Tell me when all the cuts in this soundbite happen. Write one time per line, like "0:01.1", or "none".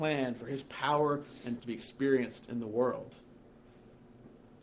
0:01.6